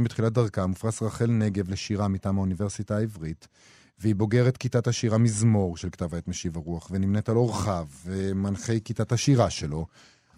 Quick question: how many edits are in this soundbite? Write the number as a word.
zero